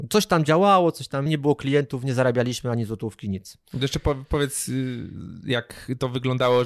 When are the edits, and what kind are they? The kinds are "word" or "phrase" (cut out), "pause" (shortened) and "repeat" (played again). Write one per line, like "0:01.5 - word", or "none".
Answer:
0:01.3 - word

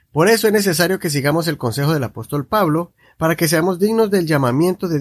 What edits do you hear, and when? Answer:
none

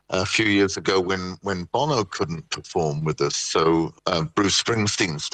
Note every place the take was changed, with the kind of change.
0:04.0 - pause

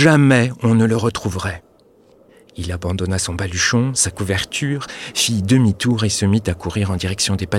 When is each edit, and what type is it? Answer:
none

